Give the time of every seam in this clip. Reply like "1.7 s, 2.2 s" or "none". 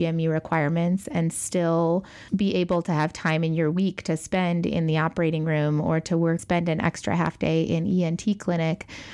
6.4 s